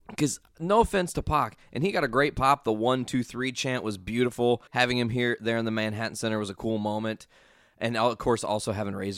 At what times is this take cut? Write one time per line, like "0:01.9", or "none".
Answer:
0:04.7